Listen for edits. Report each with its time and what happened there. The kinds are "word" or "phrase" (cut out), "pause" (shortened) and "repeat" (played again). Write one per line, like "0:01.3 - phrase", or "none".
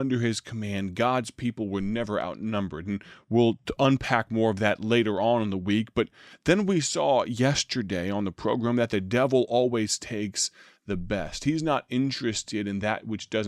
none